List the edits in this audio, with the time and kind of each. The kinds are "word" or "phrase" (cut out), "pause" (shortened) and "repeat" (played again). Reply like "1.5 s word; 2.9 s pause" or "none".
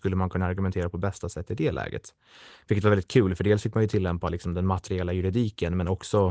none